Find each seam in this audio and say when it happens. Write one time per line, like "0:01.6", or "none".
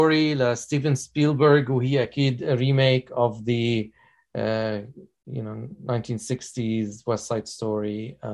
none